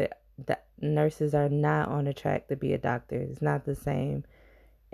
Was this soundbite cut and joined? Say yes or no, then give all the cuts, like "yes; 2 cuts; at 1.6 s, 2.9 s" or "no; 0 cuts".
no; 0 cuts